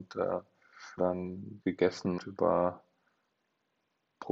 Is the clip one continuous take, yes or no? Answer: no